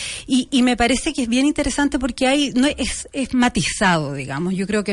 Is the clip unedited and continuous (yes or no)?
yes